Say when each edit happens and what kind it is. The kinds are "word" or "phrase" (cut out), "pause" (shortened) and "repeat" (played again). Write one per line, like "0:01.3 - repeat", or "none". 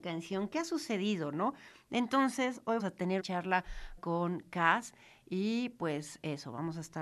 0:02.8 - word
0:03.2 - word
0:04.0 - word